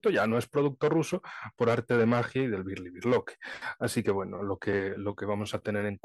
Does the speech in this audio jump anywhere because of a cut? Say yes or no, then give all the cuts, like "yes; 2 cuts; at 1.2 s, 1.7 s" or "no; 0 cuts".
no; 0 cuts